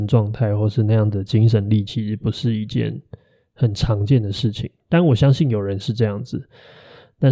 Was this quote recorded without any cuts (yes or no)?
yes